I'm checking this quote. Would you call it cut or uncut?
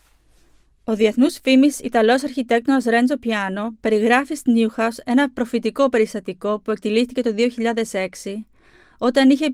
uncut